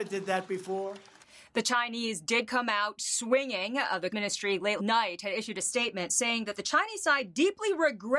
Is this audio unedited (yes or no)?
no